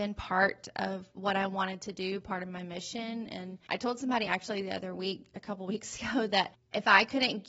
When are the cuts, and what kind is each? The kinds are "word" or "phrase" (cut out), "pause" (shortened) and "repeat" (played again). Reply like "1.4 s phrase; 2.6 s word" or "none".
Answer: none